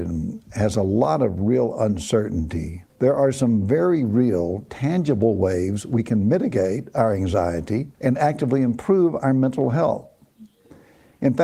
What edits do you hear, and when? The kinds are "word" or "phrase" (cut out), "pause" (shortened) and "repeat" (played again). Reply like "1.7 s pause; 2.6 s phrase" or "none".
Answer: 2.9 s pause; 7.9 s pause